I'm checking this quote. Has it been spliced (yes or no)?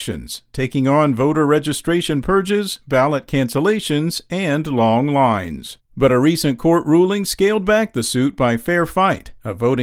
yes